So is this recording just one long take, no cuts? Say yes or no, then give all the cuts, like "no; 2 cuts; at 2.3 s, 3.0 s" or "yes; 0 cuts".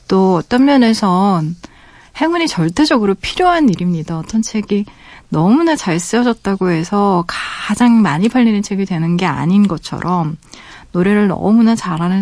yes; 0 cuts